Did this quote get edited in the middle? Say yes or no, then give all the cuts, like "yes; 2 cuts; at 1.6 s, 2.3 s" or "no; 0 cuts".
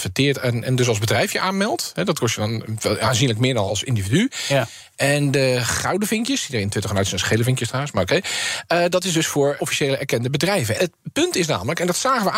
yes; 3 cuts; at 3.7 s, 9.6 s, 10.8 s